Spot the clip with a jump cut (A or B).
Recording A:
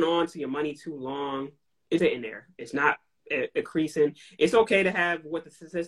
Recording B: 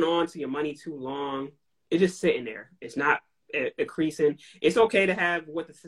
A